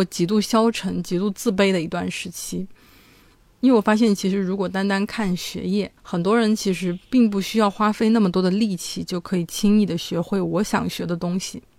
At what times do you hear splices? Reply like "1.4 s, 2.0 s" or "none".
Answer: 6.0 s